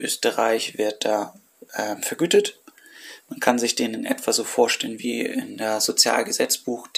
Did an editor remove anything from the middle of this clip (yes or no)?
no